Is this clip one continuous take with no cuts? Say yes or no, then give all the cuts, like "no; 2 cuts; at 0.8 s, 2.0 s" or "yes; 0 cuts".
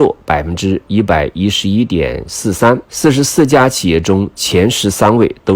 no; 1 cut; at 2.8 s